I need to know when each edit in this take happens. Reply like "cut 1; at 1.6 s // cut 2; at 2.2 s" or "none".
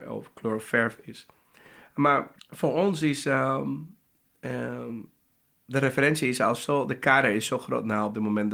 cut 1; at 2.4 s